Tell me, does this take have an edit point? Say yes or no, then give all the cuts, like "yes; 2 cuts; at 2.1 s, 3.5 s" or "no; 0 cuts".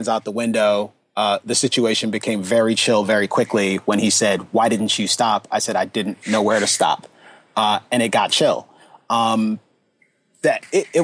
no; 0 cuts